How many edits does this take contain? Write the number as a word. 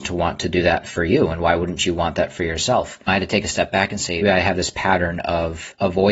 one